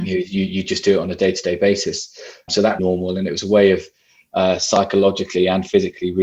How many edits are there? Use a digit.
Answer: 2